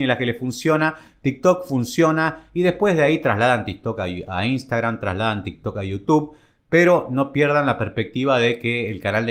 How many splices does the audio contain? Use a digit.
0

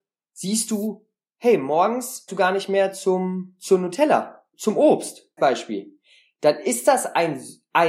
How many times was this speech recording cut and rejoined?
3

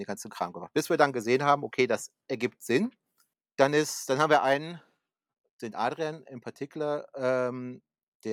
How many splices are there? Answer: 0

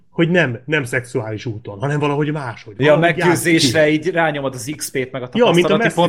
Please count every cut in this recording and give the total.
0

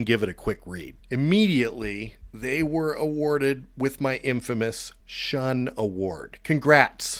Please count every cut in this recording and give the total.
2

